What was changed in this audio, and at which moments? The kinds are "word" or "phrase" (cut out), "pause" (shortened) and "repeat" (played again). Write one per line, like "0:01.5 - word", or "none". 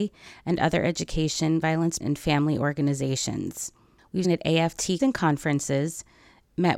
0:01.6 - word
0:02.0 - word
0:04.2 - word
0:05.0 - word